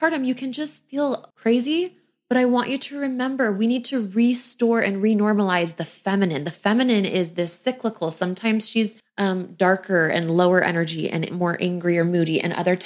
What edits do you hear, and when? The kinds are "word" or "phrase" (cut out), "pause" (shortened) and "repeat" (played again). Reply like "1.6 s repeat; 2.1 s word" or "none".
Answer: 1.3 s pause; 9.0 s pause